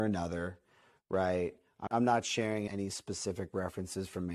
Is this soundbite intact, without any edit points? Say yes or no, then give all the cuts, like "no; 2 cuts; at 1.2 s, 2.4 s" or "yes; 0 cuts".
no; 2 cuts; at 1.9 s, 2.7 s